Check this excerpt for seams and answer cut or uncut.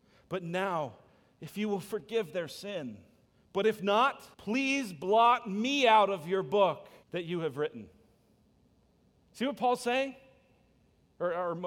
cut